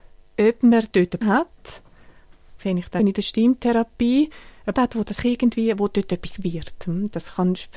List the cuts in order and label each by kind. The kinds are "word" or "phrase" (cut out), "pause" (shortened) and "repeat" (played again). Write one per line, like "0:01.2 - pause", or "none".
0:00.9 - word
0:01.2 - word
0:02.6 - word
0:03.0 - word
0:04.7 - word
0:05.2 - word
0:06.4 - word